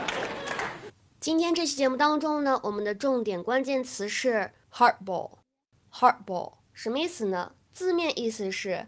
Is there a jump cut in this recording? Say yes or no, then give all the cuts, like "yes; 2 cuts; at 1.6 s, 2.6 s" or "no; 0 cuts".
no; 0 cuts